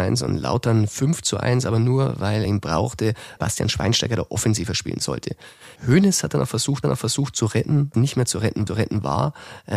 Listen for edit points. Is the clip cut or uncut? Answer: cut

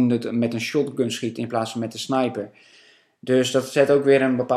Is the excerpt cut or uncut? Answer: uncut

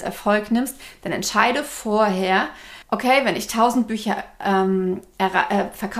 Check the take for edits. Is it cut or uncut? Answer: cut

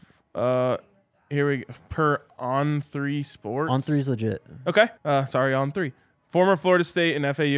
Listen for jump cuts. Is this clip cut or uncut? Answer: cut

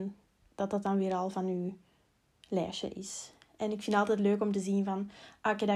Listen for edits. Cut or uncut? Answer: uncut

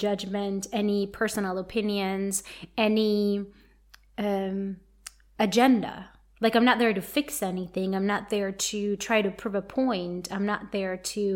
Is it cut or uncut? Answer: uncut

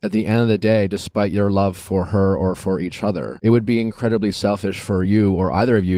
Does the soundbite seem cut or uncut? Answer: uncut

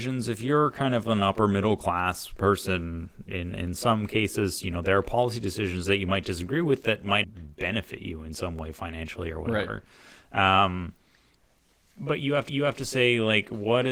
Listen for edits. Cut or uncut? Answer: cut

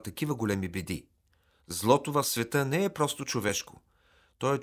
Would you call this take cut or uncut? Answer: uncut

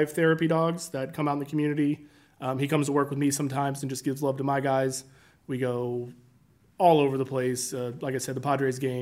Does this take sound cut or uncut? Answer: uncut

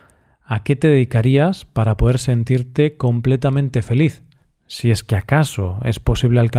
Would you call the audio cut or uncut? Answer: uncut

